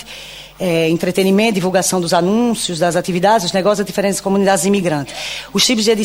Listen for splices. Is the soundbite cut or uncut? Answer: uncut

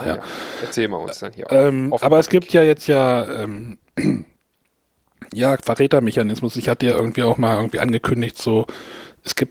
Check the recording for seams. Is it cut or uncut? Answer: uncut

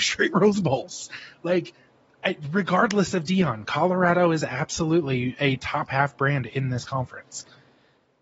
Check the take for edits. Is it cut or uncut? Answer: uncut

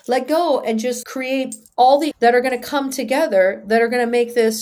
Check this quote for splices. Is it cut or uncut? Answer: cut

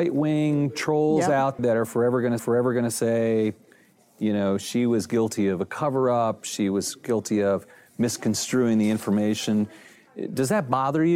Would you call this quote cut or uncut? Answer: cut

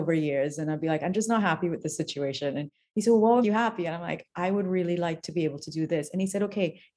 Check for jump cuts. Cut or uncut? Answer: cut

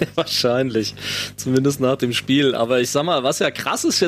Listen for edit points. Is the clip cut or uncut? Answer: uncut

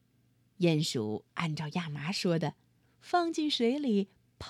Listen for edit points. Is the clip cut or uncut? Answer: cut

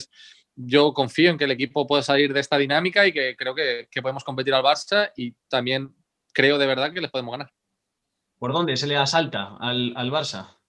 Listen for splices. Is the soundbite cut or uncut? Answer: uncut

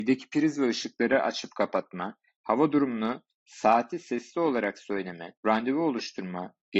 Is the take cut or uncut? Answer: cut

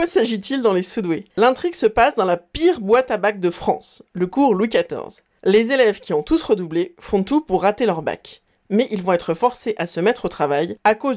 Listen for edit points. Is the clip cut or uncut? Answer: cut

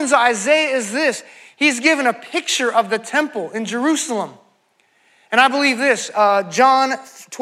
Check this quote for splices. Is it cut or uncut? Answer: uncut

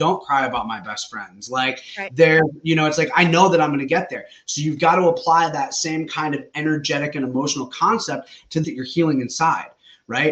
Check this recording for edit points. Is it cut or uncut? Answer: cut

